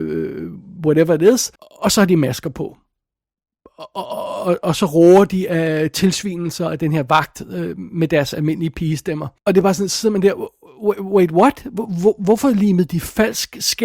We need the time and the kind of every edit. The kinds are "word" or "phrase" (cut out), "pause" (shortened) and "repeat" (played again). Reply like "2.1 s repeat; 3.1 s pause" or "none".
1.6 s pause; 9.4 s pause